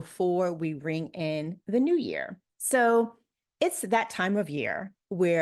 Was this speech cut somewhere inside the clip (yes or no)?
yes